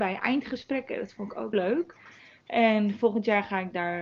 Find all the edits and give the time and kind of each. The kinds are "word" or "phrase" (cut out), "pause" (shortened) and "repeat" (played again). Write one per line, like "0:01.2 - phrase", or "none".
0:01.5 - word